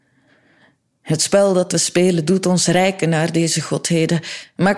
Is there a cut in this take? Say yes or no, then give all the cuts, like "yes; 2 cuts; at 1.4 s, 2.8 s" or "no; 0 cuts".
no; 0 cuts